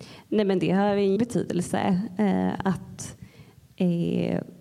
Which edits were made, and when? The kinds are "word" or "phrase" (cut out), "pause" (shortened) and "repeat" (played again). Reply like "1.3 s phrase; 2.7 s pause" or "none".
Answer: 1.2 s word